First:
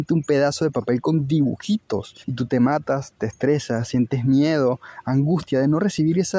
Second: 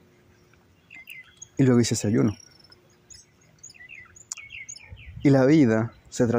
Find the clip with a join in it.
first; 1 cut; at 2.2 s

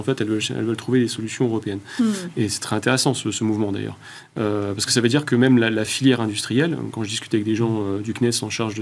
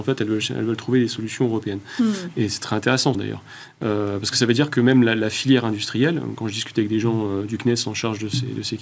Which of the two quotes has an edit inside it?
second; 1 cut; at 3.1 s

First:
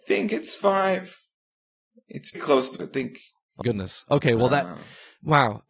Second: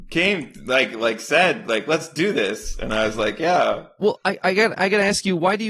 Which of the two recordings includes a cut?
first; 3 cuts; at 2.3 s, 2.8 s, 3.6 s

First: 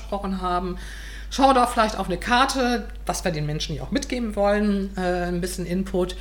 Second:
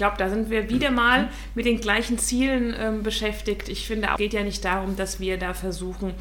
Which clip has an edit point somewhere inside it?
second; 1 cut; at 4.2 s

